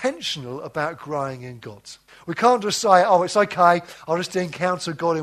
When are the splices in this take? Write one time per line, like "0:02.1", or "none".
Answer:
0:02.1